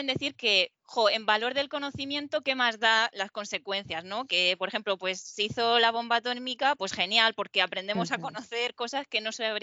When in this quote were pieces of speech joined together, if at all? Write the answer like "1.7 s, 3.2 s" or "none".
none